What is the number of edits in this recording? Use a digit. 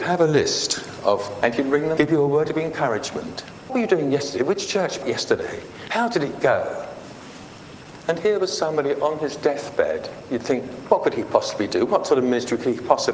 4